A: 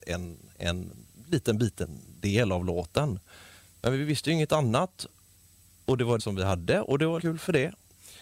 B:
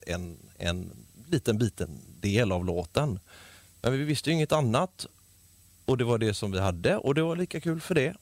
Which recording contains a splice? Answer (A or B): A